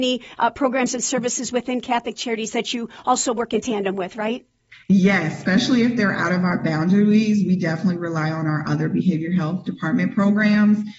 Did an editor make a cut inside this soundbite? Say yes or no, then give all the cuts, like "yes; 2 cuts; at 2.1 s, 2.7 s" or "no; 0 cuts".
yes; 1 cut; at 4.7 s